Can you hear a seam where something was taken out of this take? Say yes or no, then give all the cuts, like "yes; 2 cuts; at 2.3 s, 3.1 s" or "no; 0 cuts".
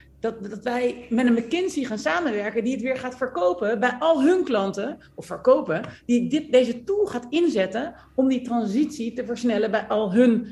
no; 0 cuts